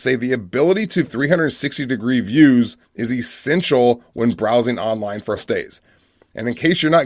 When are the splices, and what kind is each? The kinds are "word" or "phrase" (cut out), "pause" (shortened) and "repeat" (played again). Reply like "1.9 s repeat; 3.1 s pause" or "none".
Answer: 1.0 s word; 2.8 s pause; 5.4 s word

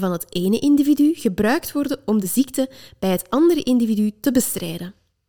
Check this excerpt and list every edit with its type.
none

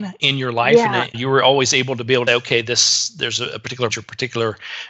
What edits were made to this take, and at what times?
1.1 s word; 2.3 s word; 3.9 s word

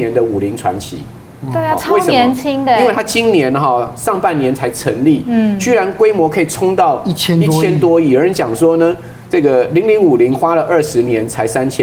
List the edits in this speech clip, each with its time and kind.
none

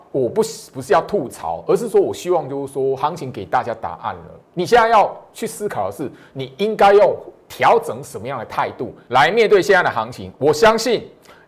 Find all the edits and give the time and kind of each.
4.4 s pause

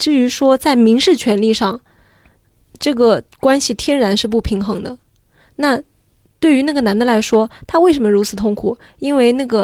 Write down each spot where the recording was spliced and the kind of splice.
none

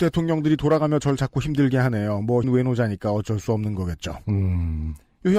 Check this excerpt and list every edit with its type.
2.4 s word

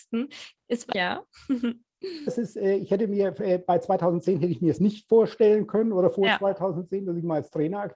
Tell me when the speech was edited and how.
0.9 s phrase; 2.3 s word

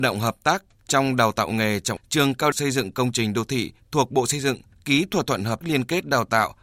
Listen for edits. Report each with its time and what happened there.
2.0 s word; 2.5 s word; 5.6 s word

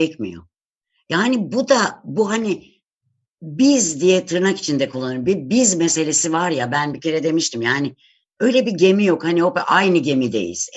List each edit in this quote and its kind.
none

